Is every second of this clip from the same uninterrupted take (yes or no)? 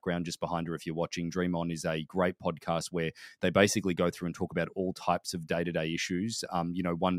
yes